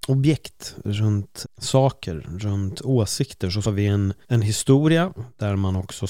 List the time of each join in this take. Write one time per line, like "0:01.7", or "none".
0:01.4
0:03.6
0:04.2